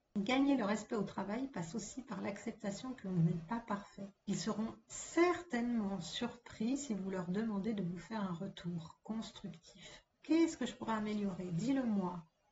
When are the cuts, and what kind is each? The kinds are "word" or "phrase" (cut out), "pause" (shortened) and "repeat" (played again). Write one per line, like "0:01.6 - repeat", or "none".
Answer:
0:04.2 - pause
0:10.1 - pause